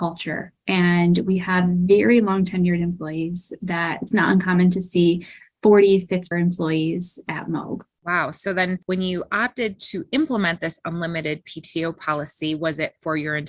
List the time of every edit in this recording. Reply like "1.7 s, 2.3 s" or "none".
6.3 s